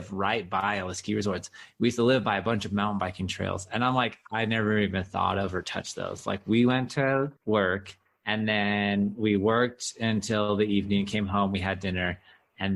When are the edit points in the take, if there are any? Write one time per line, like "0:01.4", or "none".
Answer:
0:07.4